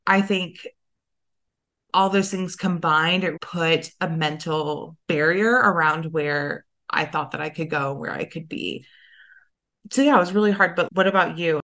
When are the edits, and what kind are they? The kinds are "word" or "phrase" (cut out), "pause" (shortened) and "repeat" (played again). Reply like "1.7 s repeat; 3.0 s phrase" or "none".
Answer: 3.4 s word; 5.0 s pause; 10.9 s word

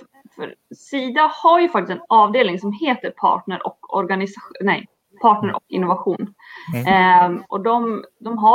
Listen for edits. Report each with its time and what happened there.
none

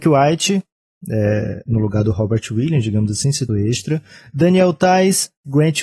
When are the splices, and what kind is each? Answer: 3.5 s phrase

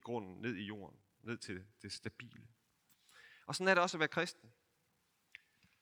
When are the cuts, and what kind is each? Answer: none

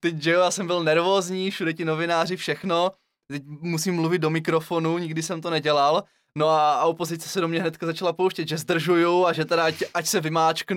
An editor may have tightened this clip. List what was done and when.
none

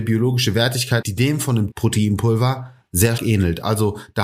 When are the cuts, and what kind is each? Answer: 1.0 s word; 1.7 s word; 3.2 s word

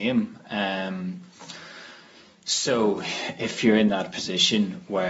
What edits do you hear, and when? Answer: none

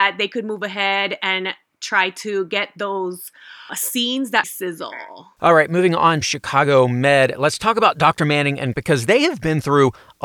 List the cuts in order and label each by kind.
3.7 s word; 4.4 s word; 6.2 s word; 8.7 s word

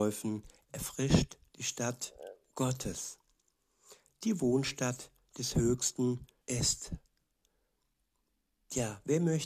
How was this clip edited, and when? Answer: 6.4 s phrase

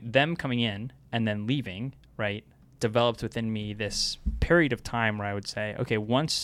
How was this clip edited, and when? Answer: none

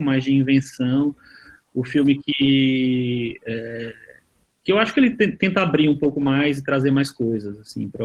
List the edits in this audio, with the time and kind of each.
none

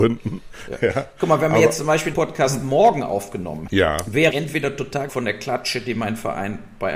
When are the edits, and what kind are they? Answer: 2.1 s word; 3.7 s word; 4.3 s word; 5.1 s word

